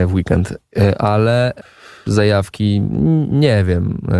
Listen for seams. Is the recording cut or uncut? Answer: uncut